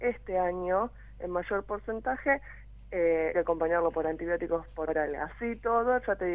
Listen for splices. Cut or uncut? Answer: cut